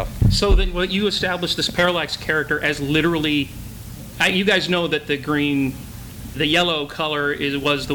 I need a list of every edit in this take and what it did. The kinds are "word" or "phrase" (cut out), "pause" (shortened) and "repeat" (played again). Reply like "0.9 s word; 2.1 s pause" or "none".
6.3 s word